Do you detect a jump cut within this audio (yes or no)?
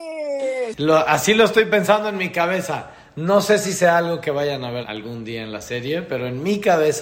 yes